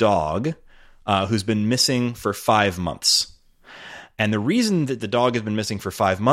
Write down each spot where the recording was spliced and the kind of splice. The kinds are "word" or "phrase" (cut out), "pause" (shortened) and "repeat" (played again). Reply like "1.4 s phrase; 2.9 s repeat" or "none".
none

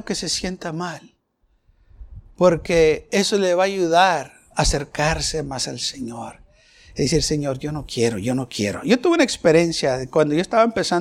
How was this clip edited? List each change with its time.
none

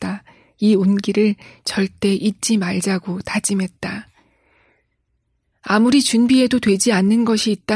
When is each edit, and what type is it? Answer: none

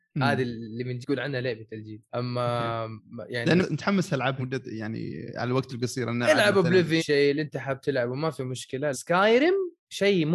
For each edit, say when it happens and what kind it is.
1.0 s word; 2.1 s pause; 3.6 s word; 4.4 s word; 7.0 s phrase; 8.9 s word

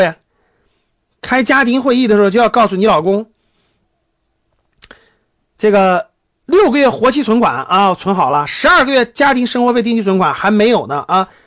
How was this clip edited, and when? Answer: none

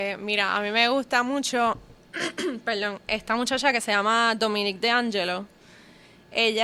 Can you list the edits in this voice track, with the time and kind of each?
none

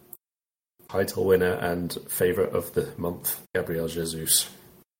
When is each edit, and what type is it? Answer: 3.4 s pause

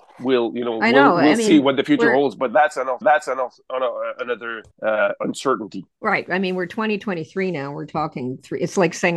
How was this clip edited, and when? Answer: 3.0 s repeat; 4.7 s pause

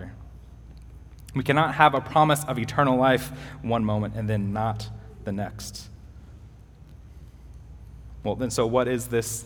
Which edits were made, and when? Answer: none

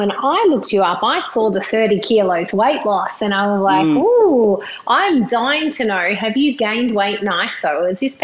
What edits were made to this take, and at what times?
none

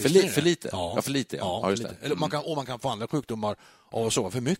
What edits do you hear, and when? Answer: none

